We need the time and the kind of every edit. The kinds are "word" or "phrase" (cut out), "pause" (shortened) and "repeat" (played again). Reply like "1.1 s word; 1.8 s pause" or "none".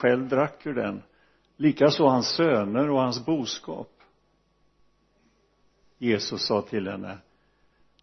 none

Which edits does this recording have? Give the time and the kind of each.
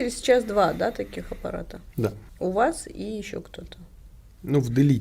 2.3 s pause

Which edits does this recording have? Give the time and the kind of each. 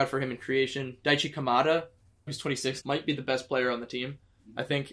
2.3 s word; 2.8 s phrase

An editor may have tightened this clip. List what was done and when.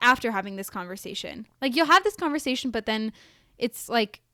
none

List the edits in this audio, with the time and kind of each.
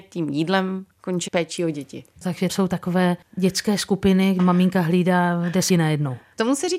1.3 s word; 2.5 s word; 4.4 s word; 5.7 s word

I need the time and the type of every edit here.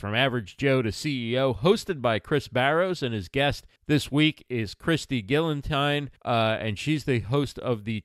3.8 s pause; 6.2 s pause

